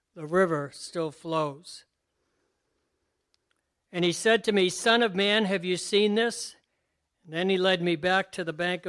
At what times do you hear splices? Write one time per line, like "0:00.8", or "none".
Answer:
none